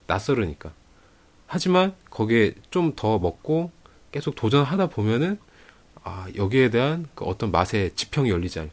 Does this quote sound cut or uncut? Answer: uncut